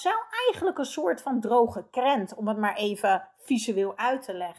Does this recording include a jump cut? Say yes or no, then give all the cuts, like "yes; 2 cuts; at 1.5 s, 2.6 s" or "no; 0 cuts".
no; 0 cuts